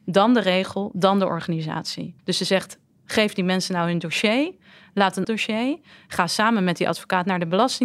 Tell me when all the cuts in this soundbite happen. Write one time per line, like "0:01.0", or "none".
0:02.2
0:05.2